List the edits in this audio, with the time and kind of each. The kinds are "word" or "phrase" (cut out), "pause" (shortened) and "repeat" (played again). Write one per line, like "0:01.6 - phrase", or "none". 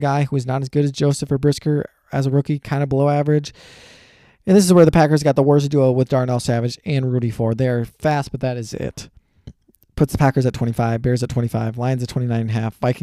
none